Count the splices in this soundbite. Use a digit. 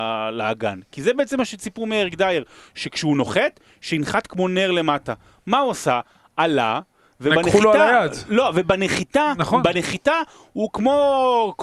0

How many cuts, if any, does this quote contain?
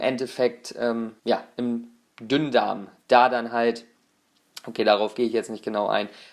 1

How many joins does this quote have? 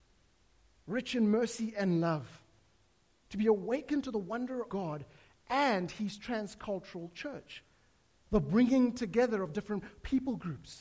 1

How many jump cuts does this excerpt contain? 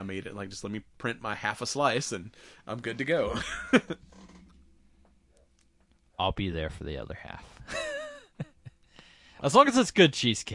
0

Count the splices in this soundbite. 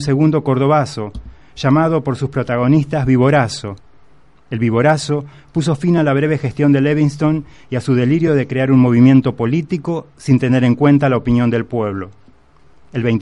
0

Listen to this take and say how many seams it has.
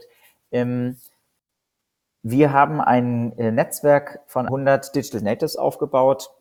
1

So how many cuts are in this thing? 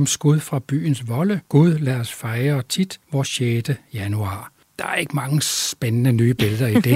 3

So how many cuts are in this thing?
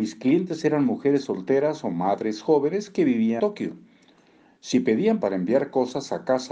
2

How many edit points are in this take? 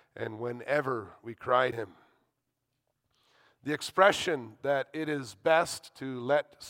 1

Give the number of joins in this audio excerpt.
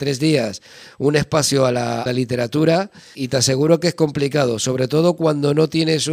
2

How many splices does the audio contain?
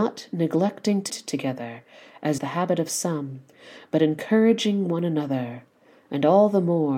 2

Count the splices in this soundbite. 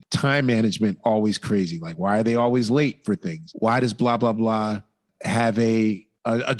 0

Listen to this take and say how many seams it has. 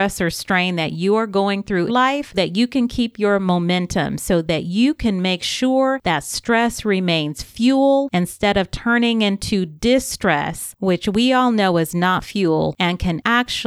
2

